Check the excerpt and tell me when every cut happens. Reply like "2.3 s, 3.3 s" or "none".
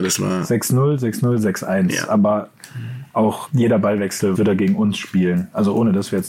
3.5 s, 4.3 s